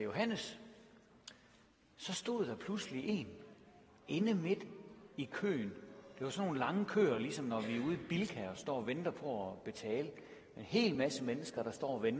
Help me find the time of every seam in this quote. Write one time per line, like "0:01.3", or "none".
none